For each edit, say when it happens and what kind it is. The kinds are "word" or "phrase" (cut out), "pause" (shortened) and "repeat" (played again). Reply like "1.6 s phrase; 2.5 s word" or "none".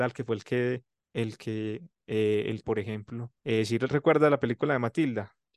2.6 s phrase; 3.4 s pause